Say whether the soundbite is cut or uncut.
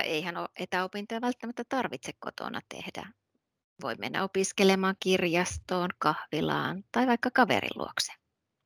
uncut